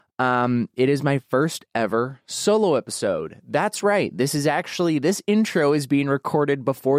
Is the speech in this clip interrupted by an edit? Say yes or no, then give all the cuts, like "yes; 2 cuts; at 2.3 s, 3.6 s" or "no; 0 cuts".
no; 0 cuts